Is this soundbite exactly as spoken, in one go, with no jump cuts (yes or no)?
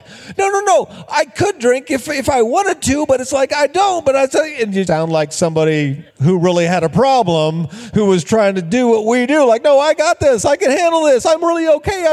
no